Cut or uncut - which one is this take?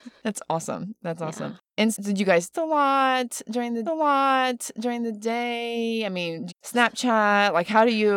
cut